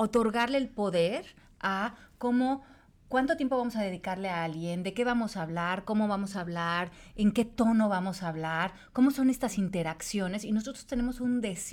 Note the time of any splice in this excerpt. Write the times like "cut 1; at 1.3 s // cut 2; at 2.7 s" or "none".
none